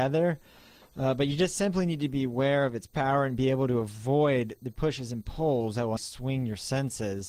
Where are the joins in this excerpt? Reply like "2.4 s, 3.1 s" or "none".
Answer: 4.7 s, 6.0 s